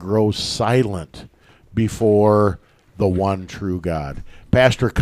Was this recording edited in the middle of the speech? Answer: no; 0 cuts

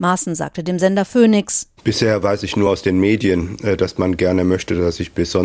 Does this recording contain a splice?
no; 0 cuts

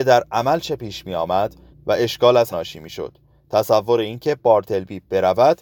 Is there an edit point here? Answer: yes; 2 cuts; at 1.7 s, 2.5 s

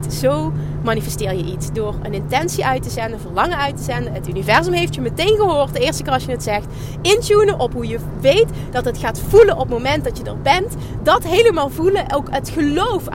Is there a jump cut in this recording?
no; 0 cuts

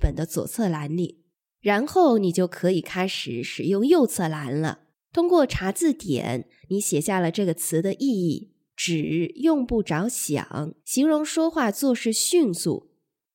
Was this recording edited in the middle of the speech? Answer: yes; 4 cuts; at 1.3 s, 4.9 s, 8.7 s, 10.8 s

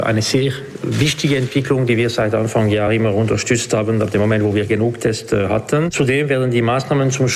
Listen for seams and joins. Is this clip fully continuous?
yes; 0 cuts

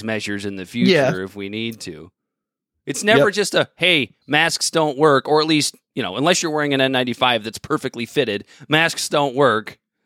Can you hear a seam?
no; 0 cuts

